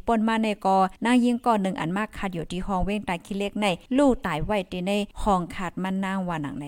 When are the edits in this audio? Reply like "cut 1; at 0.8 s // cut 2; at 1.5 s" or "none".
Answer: cut 1; at 1.0 s // cut 2; at 3.9 s // cut 3; at 5.1 s